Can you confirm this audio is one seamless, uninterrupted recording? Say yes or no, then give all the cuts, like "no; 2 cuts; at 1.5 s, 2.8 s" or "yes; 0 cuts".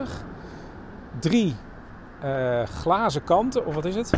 yes; 0 cuts